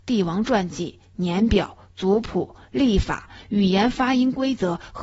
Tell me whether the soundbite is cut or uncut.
uncut